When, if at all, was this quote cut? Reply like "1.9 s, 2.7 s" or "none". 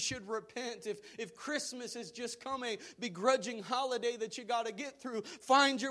none